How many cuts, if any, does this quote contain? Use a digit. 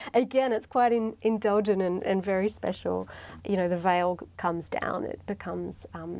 0